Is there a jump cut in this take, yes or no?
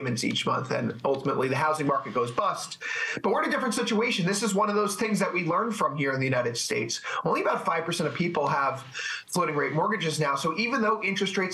no